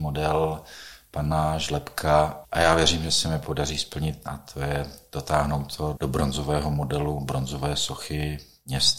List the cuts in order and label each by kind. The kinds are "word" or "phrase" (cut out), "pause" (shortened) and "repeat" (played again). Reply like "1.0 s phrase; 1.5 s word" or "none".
2.4 s word; 4.3 s phrase; 6.0 s word